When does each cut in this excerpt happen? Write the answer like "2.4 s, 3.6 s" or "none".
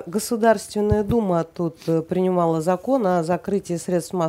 none